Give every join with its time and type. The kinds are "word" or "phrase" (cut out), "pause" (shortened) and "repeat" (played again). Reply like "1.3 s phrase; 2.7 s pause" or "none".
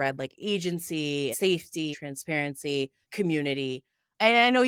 1.3 s word; 1.9 s word; 3.0 s word